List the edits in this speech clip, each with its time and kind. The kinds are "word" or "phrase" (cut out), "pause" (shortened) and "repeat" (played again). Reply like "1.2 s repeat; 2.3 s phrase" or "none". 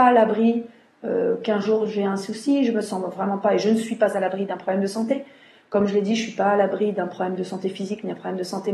none